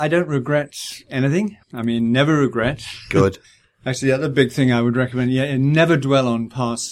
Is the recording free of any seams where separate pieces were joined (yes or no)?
no